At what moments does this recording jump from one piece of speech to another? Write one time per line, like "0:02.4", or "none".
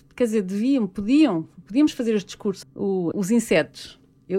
0:02.6
0:03.1